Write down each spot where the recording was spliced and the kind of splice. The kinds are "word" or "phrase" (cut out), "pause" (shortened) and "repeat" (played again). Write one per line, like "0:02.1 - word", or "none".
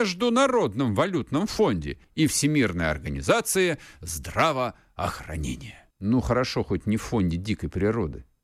0:02.0 - pause
0:05.9 - pause